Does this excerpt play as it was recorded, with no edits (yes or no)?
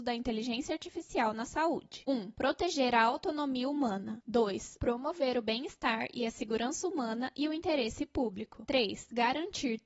yes